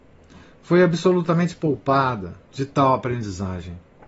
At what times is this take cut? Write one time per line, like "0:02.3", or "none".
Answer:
0:02.4